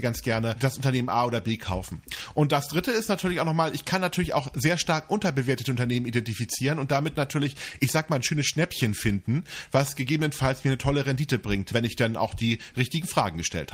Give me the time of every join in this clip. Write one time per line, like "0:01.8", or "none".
none